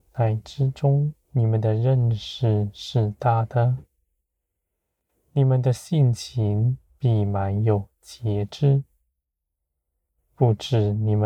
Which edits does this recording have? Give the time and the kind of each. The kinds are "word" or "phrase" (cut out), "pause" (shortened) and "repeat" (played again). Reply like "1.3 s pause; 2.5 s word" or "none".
1.2 s pause